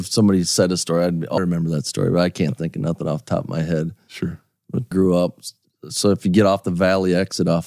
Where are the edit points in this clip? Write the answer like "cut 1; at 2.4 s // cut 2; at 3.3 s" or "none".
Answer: cut 1; at 1.4 s // cut 2; at 4.9 s